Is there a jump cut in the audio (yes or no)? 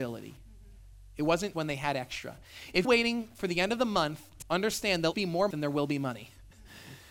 yes